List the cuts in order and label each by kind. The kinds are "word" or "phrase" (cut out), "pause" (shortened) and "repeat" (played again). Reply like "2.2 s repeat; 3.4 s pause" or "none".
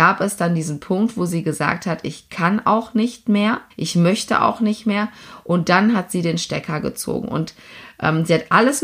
3.7 s pause